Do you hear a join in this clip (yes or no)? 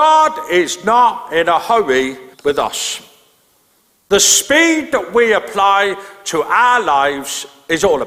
yes